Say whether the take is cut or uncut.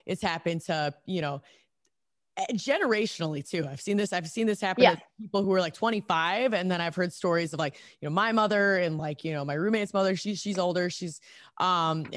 uncut